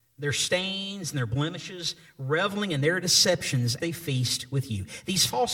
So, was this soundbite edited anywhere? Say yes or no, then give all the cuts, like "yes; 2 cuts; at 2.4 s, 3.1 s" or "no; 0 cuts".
yes; 1 cut; at 3.8 s